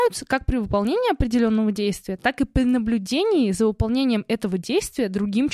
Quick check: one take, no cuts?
yes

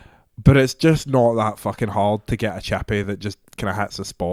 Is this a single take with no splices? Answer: yes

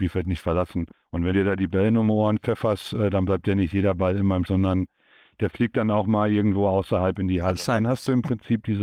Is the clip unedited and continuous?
no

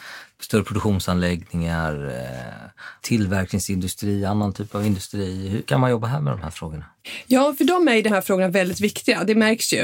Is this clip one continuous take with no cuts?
yes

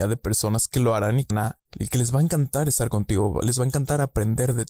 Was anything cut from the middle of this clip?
yes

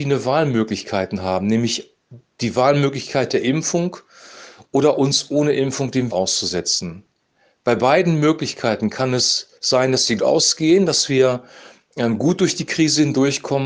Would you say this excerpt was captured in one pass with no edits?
no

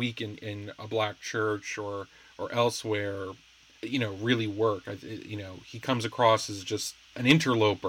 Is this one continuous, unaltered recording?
yes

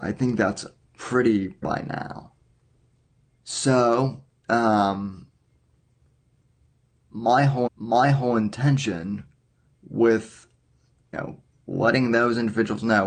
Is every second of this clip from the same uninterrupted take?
no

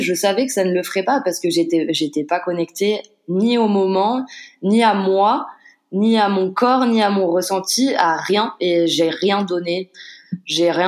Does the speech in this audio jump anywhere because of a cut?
no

